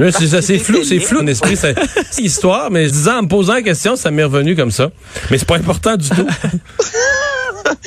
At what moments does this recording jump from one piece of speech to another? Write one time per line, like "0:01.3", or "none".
0:01.2
0:02.2
0:02.9